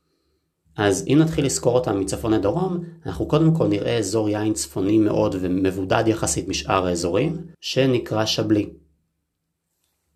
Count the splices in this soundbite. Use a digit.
1